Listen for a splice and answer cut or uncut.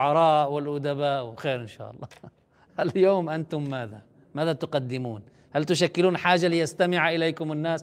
uncut